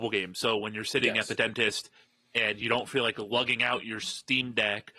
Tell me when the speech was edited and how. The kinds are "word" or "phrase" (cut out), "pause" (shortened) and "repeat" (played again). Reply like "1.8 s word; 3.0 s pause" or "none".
none